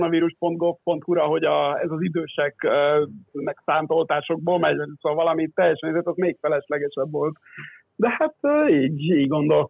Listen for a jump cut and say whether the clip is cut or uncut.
cut